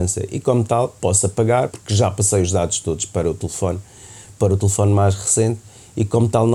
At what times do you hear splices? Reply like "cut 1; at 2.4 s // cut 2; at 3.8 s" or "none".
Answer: cut 1; at 1.7 s